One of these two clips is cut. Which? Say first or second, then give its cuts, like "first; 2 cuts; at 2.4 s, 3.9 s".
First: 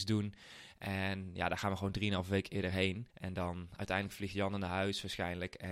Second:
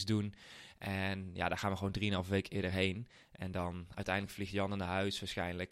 first; 1 cut; at 3.1 s